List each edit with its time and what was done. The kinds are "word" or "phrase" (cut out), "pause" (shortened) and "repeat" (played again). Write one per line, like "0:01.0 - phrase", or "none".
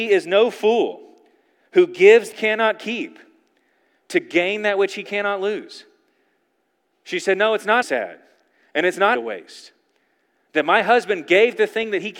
0:02.3 - phrase
0:07.8 - word
0:09.2 - word

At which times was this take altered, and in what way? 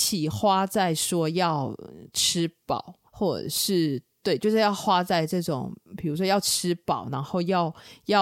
0:03.1 - pause

